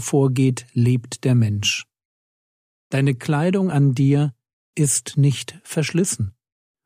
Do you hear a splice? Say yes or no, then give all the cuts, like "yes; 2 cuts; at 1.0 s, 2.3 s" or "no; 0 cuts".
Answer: no; 0 cuts